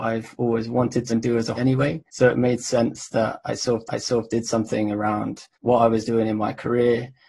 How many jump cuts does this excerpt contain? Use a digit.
5